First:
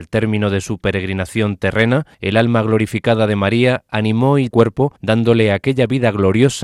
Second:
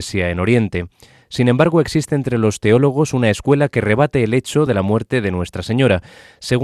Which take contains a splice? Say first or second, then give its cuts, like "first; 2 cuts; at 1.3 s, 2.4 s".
first; 3 cuts; at 2.1 s, 4.5 s, 5.0 s